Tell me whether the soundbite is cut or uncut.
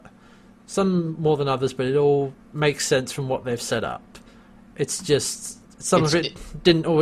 uncut